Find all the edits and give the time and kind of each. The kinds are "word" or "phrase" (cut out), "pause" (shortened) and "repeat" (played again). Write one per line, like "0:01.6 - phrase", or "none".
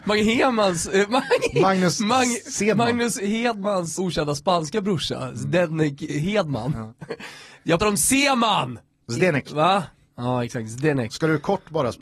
0:04.0 - word
0:07.8 - word